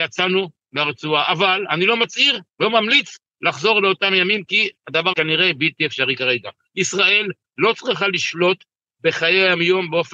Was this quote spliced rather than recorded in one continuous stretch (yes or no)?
yes